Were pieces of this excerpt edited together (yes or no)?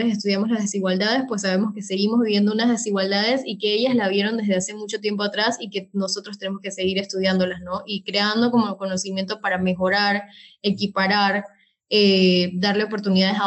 no